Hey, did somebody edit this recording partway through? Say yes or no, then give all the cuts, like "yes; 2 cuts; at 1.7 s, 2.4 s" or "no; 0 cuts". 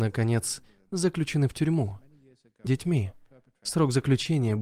yes; 1 cut; at 2.7 s